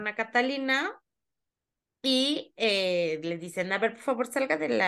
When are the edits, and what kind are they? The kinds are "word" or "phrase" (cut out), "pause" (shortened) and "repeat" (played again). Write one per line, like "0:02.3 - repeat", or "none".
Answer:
none